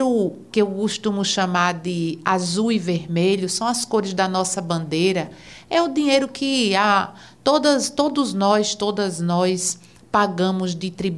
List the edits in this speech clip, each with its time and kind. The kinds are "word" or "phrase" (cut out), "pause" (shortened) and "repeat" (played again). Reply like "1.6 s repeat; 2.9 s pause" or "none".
none